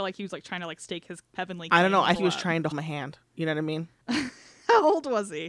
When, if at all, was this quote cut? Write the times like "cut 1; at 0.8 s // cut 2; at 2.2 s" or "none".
cut 1; at 1.3 s // cut 2; at 2.1 s // cut 3; at 2.7 s // cut 4; at 3.2 s